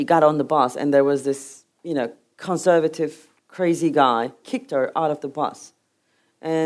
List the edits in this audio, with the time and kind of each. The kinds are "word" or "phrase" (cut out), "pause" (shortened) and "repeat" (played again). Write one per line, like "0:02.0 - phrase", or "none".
0:01.7 - pause
0:03.4 - pause
0:04.4 - word